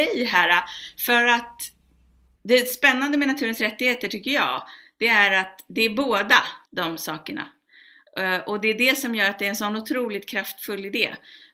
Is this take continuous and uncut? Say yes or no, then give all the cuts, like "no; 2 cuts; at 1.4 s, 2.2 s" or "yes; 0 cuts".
no; 2 cuts; at 2.4 s, 6.7 s